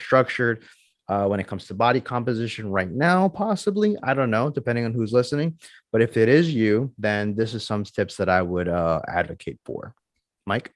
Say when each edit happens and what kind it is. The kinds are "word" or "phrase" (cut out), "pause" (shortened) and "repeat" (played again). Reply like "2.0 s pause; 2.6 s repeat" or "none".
none